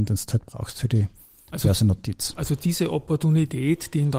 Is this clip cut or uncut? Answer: uncut